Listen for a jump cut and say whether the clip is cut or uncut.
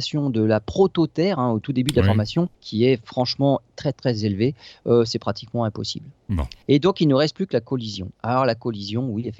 cut